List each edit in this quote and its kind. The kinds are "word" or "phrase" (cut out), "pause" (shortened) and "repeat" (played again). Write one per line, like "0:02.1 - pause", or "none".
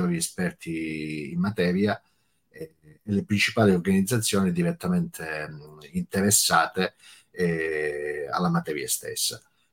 none